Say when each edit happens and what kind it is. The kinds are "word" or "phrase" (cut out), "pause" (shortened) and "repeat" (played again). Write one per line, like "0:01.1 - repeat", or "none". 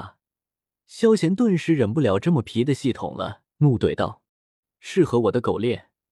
0:03.5 - pause
0:04.3 - pause